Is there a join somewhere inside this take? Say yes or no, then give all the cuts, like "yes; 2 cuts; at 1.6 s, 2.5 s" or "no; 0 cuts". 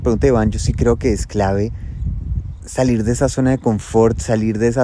no; 0 cuts